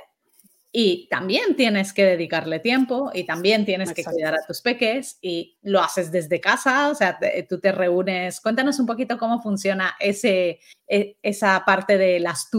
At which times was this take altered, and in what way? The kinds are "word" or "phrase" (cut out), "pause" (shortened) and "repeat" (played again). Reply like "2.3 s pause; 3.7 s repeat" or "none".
10.7 s pause